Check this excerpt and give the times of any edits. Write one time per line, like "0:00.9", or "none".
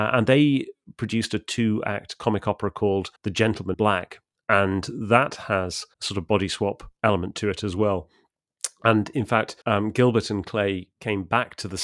0:03.2
0:03.7
0:04.4
0:05.9
0:07.0
0:09.6